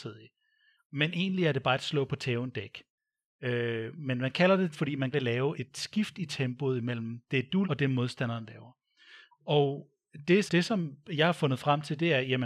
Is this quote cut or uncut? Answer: cut